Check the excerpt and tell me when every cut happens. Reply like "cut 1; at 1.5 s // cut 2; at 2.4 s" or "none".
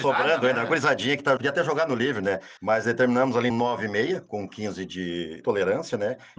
cut 1; at 1.4 s // cut 2; at 2.6 s // cut 3; at 3.5 s // cut 4; at 5.4 s